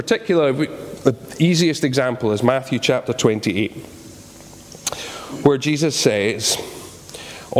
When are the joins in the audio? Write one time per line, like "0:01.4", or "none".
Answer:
none

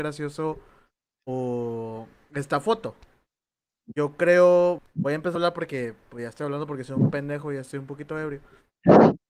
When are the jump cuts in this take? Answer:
0:04.8
0:05.4

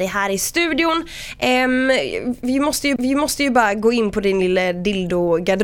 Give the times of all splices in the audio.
0:03.0

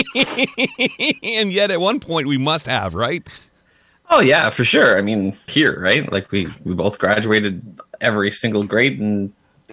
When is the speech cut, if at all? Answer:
0:05.5

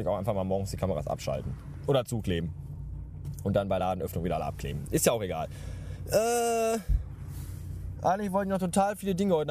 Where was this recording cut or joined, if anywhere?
none

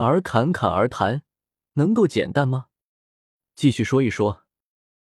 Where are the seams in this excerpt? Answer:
none

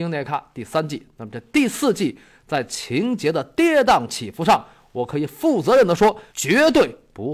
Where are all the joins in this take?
0:06.3

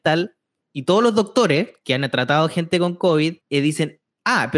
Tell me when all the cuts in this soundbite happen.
0:03.4

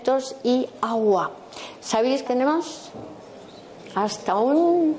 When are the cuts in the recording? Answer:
0:02.3

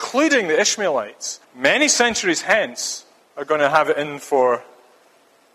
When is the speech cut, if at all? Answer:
0:01.4
0:03.2

